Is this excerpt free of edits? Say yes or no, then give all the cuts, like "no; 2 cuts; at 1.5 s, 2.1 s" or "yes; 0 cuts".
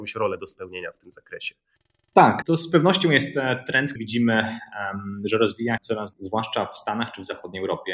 no; 4 cuts; at 2.4 s, 4.0 s, 5.8 s, 6.1 s